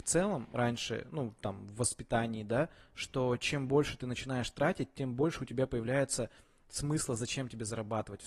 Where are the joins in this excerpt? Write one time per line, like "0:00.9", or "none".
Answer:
none